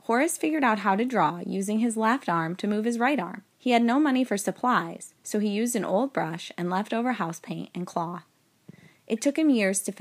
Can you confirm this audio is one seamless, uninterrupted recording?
no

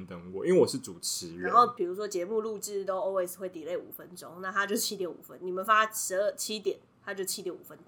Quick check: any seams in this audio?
no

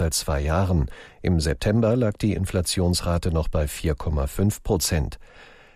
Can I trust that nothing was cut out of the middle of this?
yes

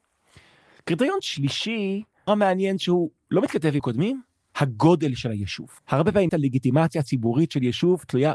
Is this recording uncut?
no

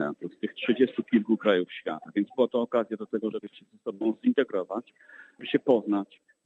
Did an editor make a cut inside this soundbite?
no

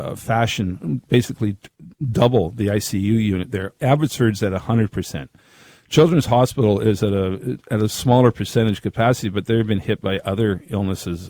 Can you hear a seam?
no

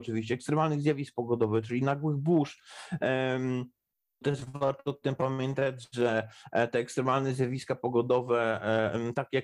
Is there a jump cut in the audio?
yes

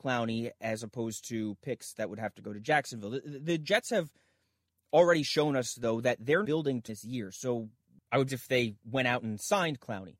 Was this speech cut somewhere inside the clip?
yes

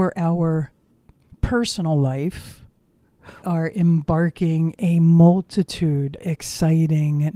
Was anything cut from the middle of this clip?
yes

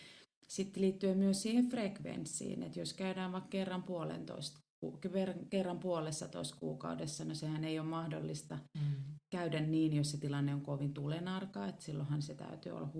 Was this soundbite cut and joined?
no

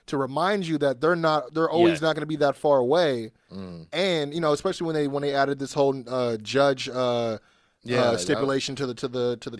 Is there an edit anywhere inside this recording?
no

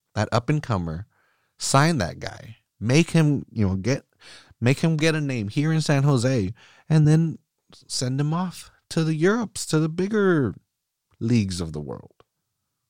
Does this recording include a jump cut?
no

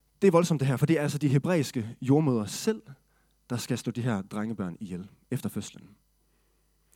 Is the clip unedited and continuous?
yes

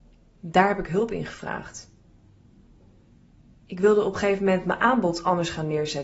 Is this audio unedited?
yes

